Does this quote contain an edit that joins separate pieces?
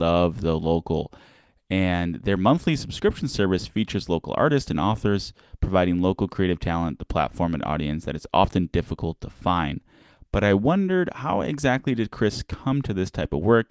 no; 0 cuts

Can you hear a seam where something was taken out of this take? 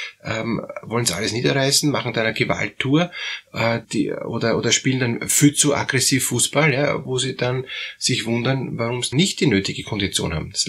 yes; 3 cuts; at 3.8 s, 7.1 s, 9.1 s

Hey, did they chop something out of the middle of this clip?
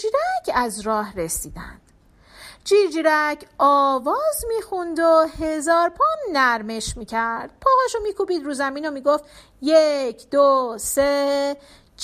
no; 0 cuts

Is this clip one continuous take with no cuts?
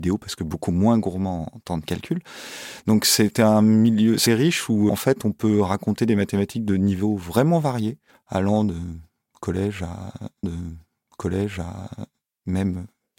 no; 4 cuts; at 4.3 s, 4.9 s, 8.1 s, 10.4 s

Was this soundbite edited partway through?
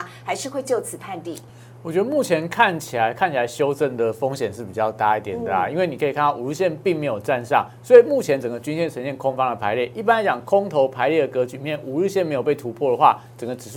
no; 0 cuts

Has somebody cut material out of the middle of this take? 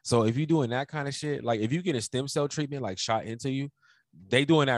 no; 0 cuts

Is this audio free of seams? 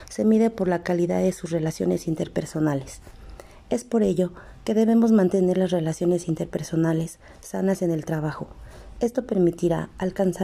yes; 0 cuts

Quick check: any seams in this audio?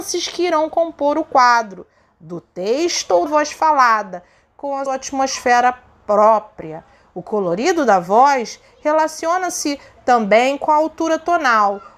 yes; 2 cuts; at 3.3 s, 4.9 s

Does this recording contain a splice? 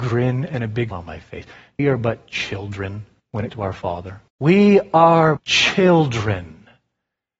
yes; 6 cuts; at 0.9 s, 1.8 s, 3.2 s, 3.5 s, 4.3 s, 5.4 s

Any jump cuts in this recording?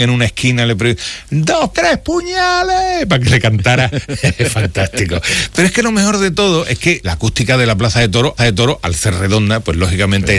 yes; 3 cuts; at 1.7 s, 7.0 s, 8.4 s

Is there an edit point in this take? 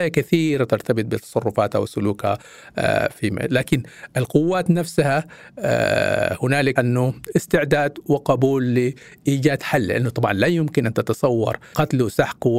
yes; 2 cuts; at 3.1 s, 6.8 s

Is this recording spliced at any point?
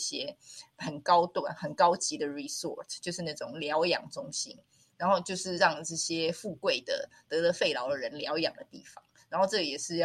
no; 0 cuts

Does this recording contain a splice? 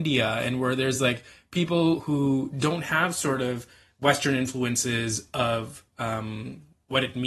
no; 0 cuts

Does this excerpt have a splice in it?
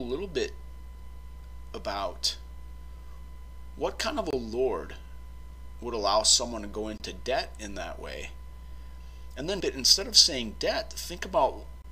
yes; 1 cut; at 9.6 s

